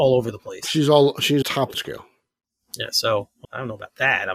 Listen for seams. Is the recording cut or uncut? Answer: cut